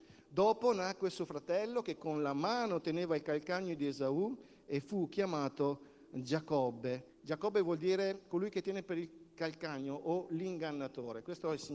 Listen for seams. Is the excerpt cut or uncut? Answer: cut